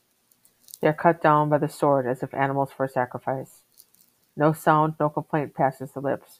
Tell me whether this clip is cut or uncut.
uncut